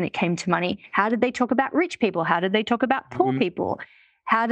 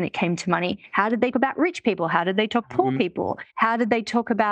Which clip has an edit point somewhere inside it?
second; 3 cuts; at 1.3 s, 2.6 s, 3.5 s

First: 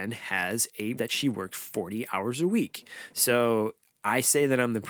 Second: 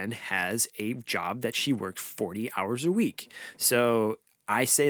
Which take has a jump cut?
first; 1 cut; at 1.0 s

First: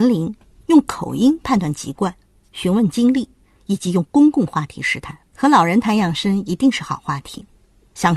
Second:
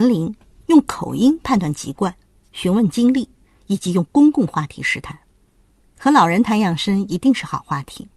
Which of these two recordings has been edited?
first; 1 cut; at 5.3 s

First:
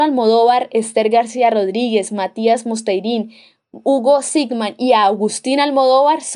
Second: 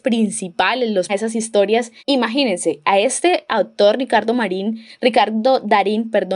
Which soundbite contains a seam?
second; 2 cuts; at 1.1 s, 2.0 s

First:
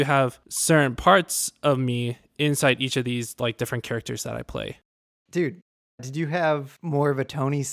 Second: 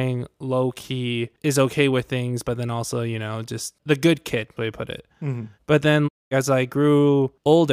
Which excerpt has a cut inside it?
second; 2 cuts; at 4.6 s, 5.5 s

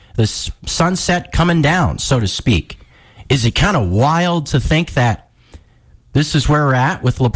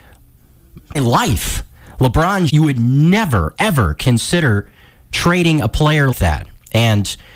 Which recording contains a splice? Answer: second; 4 cuts; at 0.9 s, 2.5 s, 3.6 s, 6.1 s

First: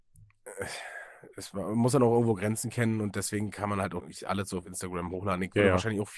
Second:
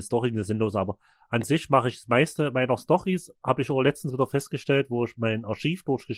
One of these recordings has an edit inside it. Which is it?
first; 1 cut; at 4.0 s

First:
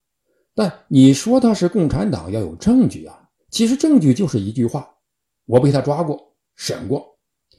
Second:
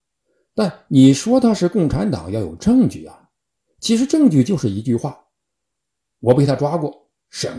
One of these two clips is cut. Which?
first; 2 cuts; at 3.4 s, 5.0 s

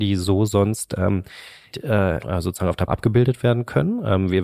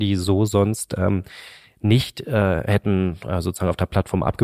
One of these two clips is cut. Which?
first; 3 cuts; at 1.7 s, 2.2 s, 2.9 s

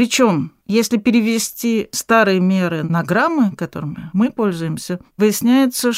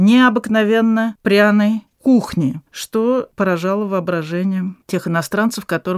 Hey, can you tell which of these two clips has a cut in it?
second; 1 cut; at 2.7 s

